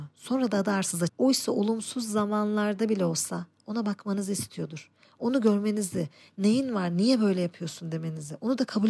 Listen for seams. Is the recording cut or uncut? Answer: cut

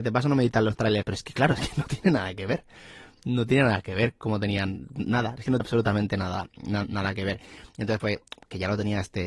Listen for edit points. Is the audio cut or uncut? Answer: cut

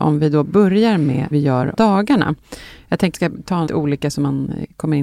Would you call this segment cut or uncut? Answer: cut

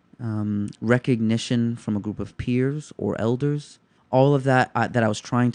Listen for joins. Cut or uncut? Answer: cut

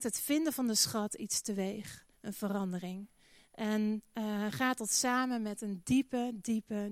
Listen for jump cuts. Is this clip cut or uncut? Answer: cut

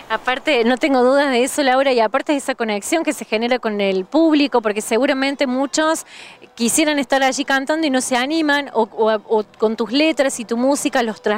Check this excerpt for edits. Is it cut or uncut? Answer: uncut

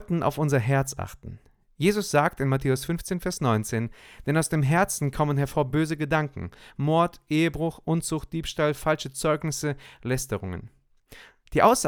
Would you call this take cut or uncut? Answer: uncut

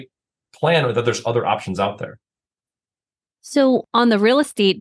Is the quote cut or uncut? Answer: uncut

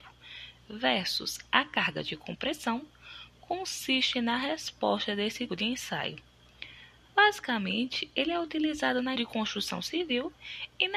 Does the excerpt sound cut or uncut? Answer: cut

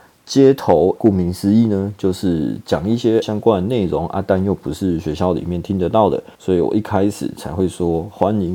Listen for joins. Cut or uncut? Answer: cut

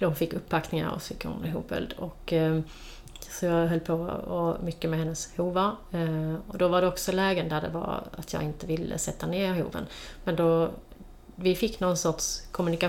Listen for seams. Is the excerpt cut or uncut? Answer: uncut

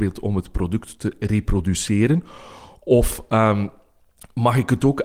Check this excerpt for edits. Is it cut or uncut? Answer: uncut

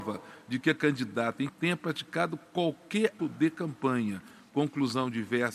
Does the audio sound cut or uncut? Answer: cut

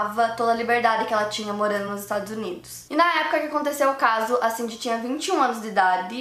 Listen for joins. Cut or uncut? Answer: uncut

